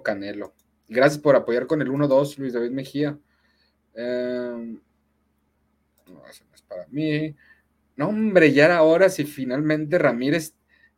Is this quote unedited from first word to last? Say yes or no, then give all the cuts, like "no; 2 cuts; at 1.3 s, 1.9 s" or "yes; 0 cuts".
yes; 0 cuts